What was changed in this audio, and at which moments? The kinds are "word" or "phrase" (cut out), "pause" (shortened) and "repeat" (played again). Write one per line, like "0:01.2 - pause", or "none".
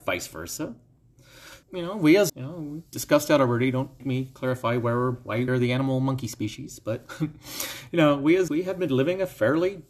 0:01.6 - word
0:02.3 - word
0:02.9 - word
0:04.0 - word
0:05.5 - word
0:08.5 - word